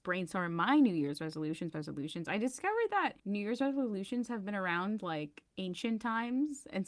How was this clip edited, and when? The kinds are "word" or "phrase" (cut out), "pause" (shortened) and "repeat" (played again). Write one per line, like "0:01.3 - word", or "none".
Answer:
0:01.7 - phrase
0:03.2 - pause
0:05.0 - word
0:05.5 - pause